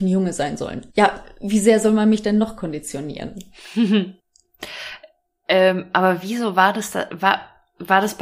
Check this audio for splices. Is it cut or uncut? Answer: cut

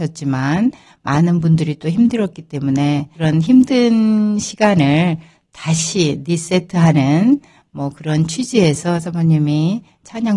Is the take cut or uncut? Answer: uncut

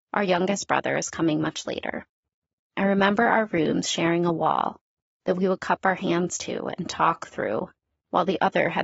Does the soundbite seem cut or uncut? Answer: uncut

